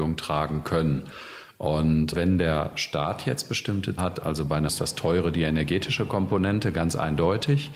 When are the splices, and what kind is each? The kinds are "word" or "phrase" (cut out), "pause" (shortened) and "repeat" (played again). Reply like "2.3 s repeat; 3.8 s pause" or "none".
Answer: 2.1 s word; 4.0 s word; 4.7 s word